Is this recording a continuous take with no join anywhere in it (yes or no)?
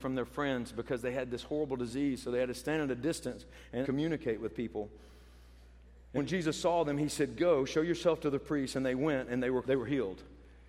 no